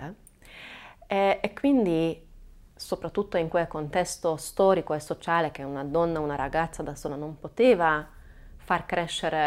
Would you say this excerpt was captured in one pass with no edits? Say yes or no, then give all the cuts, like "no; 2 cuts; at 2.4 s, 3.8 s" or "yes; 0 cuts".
yes; 0 cuts